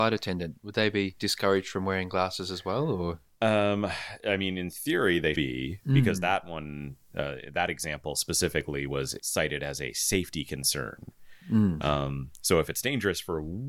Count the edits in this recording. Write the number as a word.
one